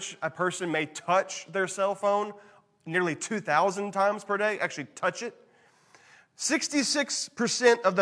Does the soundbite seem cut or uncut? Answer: uncut